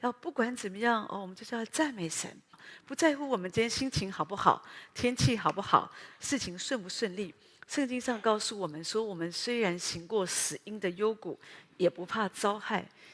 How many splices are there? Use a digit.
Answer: 1